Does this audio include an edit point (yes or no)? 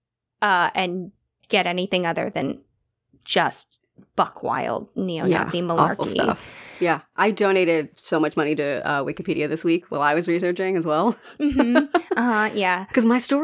no